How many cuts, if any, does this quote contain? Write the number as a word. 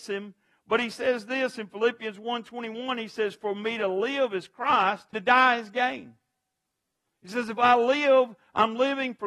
one